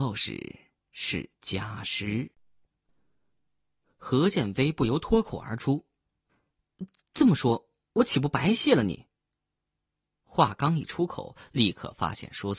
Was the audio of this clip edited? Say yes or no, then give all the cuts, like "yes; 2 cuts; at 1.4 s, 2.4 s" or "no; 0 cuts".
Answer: no; 0 cuts